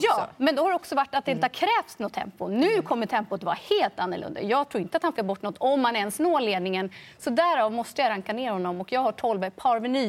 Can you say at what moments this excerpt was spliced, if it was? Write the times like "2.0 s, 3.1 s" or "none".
5.2 s